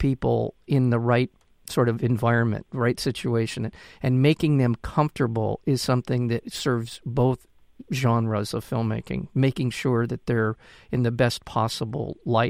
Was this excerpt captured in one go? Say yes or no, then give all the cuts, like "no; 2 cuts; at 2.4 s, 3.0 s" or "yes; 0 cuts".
no; 1 cut; at 2.7 s